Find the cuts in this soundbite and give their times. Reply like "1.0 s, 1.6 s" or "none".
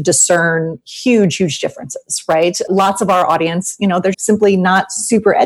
4.1 s